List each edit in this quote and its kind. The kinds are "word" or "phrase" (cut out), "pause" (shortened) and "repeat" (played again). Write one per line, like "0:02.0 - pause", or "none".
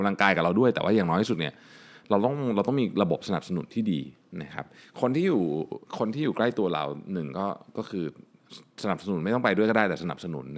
0:05.9 - pause